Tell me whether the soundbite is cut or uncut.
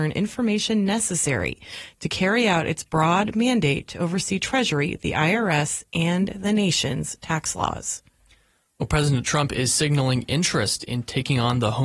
uncut